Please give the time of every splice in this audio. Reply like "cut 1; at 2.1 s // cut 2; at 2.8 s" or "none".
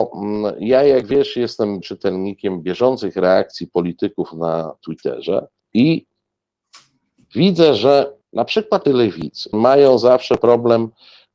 cut 1; at 1.8 s // cut 2; at 5.6 s // cut 3; at 8.2 s // cut 4; at 8.8 s // cut 5; at 9.5 s